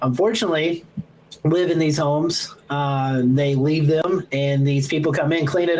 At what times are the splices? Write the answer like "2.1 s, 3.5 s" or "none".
none